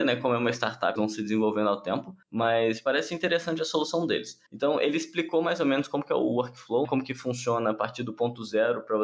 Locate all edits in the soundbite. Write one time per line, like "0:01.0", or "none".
0:01.0
0:02.2
0:04.5
0:06.8